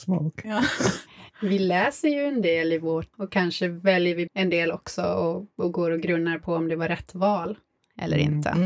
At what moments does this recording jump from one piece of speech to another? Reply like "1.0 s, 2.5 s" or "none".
3.1 s, 4.3 s